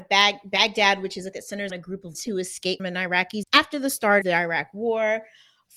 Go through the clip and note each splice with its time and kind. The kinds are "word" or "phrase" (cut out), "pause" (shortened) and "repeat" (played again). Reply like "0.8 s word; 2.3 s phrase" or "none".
1.3 s word; 1.7 s word; 2.1 s word; 2.8 s word; 3.4 s word; 4.2 s word